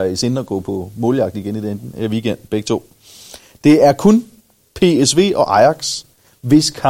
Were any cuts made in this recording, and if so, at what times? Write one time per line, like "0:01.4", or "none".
none

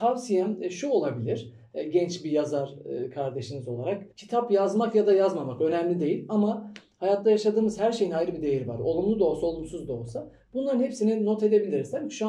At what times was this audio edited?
0:04.1

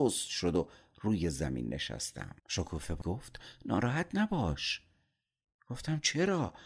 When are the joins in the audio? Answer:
0:02.4
0:03.0

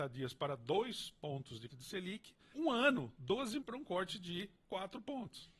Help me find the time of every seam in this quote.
0:01.7
0:02.5
0:03.6

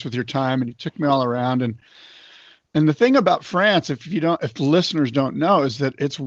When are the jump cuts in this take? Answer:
none

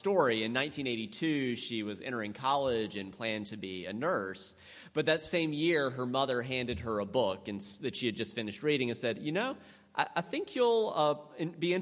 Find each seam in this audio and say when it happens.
none

